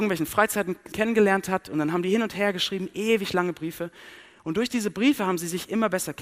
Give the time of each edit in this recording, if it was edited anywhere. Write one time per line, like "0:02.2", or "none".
0:00.9